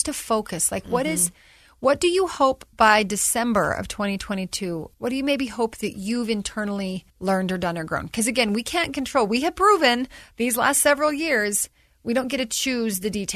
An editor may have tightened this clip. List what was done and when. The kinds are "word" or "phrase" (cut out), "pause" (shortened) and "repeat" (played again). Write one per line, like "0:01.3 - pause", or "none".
0:04.9 - pause
0:07.1 - pause